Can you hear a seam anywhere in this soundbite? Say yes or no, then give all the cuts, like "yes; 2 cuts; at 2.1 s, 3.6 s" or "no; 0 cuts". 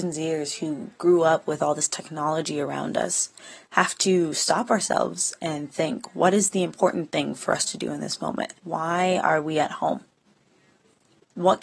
yes; 1 cut; at 8.6 s